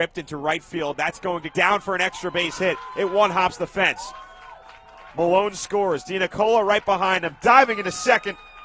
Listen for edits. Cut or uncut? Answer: cut